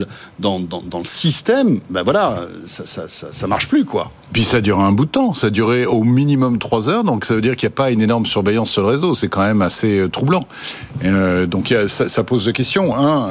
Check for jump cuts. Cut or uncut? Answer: uncut